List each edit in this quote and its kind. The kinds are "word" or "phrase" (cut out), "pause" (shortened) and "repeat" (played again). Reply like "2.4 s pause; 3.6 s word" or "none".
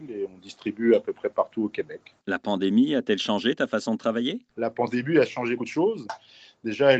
2.2 s pause; 4.5 s pause; 5.6 s word